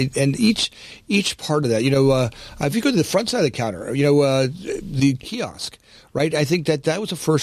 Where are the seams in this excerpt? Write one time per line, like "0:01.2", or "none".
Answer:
0:02.7